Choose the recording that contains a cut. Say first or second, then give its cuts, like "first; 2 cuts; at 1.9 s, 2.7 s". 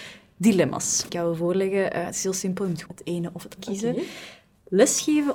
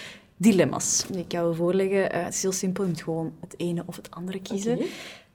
first; 3 cuts; at 1.1 s, 2.8 s, 3.6 s